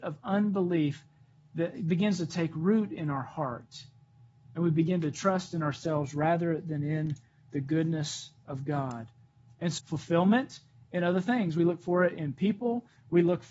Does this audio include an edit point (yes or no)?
yes